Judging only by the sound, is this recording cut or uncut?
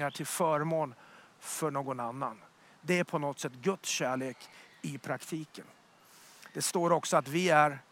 uncut